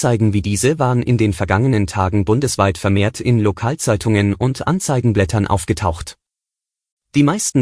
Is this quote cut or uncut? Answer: uncut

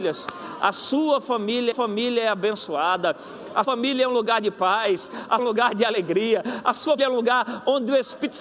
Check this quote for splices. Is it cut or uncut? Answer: cut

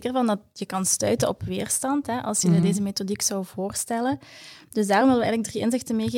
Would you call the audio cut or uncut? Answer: uncut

